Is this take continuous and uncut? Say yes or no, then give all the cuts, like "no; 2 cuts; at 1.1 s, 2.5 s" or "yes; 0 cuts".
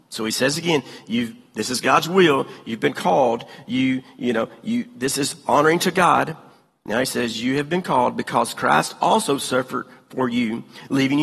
yes; 0 cuts